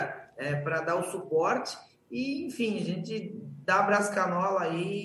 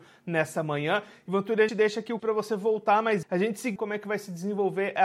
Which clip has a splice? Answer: second; 4 cuts; at 1.7 s, 2.2 s, 3.2 s, 3.8 s

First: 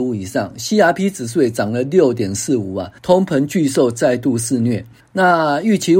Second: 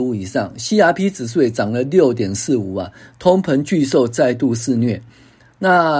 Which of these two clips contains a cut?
first; 2 cuts; at 3.0 s, 5.0 s

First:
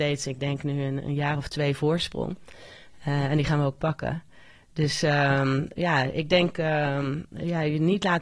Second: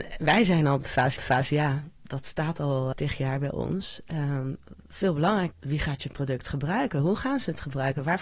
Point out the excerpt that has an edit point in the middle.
second; 3 cuts; at 1.2 s, 2.9 s, 5.5 s

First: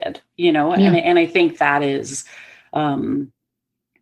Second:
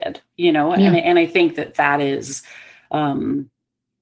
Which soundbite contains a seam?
first; 1 cut; at 1.6 s

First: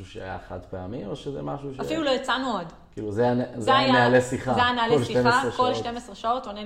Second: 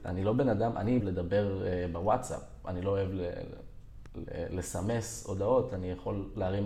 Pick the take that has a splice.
second; 1 cut; at 1.0 s

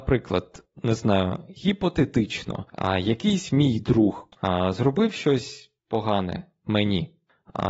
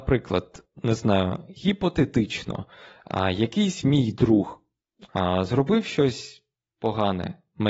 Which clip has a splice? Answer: first; 3 cuts; at 2.7 s, 4.3 s, 5.8 s

